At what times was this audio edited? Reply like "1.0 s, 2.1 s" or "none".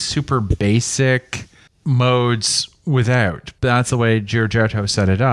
3.6 s